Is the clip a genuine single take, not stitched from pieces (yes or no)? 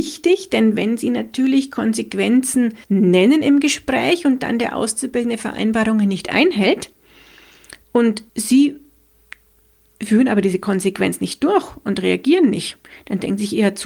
no